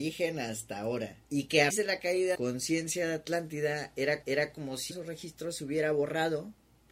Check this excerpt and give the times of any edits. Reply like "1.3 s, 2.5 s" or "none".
1.2 s, 1.7 s, 2.3 s, 4.2 s, 4.9 s